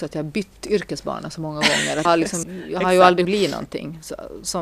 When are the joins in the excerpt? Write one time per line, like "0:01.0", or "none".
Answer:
0:02.0
0:02.4
0:03.2